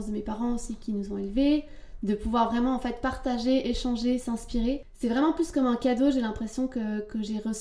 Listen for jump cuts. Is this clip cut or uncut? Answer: uncut